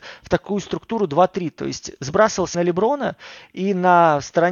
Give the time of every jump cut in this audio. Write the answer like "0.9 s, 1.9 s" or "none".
2.5 s